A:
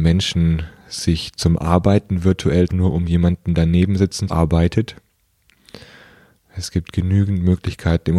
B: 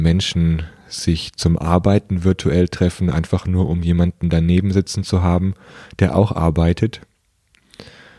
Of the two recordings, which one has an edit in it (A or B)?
A